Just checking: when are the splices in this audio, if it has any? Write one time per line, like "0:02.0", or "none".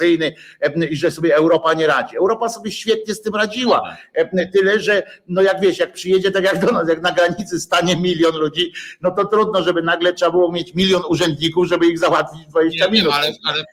none